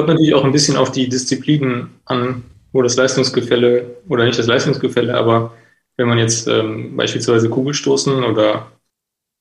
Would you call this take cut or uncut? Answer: uncut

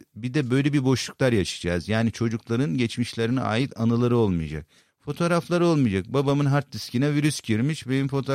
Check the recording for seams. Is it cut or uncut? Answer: uncut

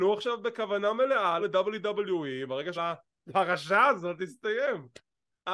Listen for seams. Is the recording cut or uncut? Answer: cut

